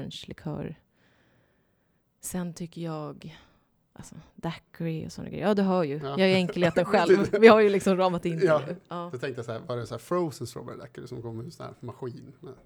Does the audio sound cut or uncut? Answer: uncut